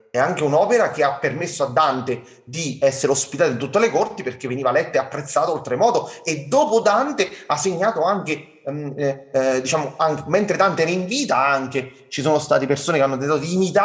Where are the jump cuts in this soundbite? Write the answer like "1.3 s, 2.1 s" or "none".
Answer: none